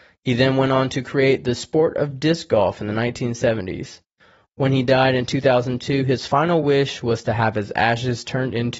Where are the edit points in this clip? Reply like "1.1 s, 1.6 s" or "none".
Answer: none